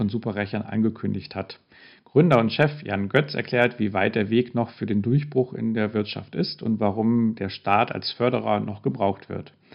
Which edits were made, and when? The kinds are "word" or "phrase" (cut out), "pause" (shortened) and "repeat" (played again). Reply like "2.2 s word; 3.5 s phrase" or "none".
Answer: none